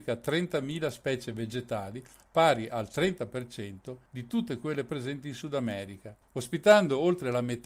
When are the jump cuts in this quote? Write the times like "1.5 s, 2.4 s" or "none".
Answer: 4.1 s, 6.2 s